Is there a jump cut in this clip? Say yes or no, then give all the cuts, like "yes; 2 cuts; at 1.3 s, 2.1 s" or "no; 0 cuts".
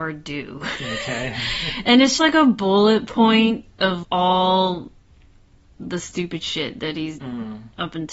yes; 3 cuts; at 2.2 s, 4.0 s, 7.2 s